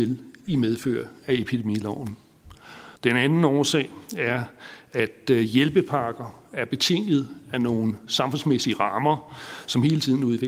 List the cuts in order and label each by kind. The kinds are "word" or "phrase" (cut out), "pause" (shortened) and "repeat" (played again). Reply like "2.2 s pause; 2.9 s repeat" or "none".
3.0 s pause